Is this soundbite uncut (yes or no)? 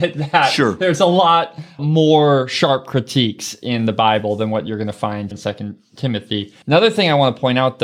no